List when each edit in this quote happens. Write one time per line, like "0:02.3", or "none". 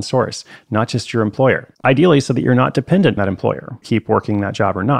0:01.7
0:03.2
0:03.8